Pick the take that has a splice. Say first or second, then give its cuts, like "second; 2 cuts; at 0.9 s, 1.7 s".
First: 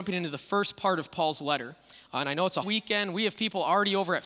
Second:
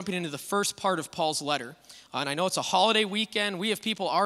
first; 1 cut; at 2.6 s